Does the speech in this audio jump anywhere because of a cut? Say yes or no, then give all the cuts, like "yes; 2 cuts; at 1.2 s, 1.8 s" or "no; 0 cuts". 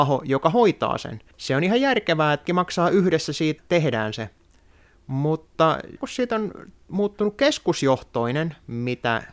yes; 4 cuts; at 1.3 s, 2.4 s, 3.6 s, 6.0 s